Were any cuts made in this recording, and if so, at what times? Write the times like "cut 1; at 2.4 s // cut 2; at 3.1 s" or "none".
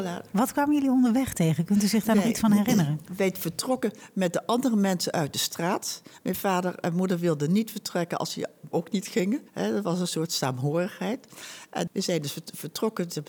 cut 1; at 8.7 s // cut 2; at 9.5 s // cut 3; at 11.9 s